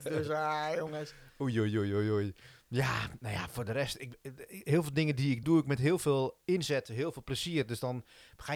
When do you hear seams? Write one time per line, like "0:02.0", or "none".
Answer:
0:05.4